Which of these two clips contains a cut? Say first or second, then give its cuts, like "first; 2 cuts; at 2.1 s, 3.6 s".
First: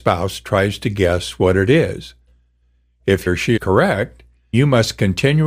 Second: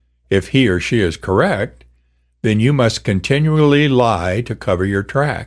first; 3 cuts; at 3.3 s, 3.6 s, 4.5 s